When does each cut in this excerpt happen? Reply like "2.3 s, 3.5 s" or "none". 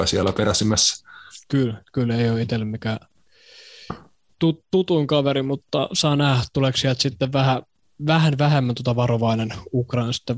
7.8 s